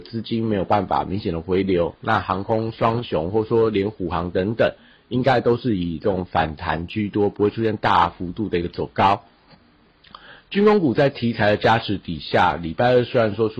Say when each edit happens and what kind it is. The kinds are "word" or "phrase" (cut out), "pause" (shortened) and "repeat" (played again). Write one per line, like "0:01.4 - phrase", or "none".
none